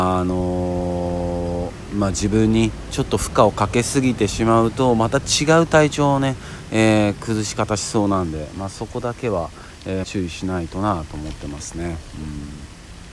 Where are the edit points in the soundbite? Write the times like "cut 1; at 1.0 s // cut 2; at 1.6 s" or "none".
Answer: cut 1; at 10.0 s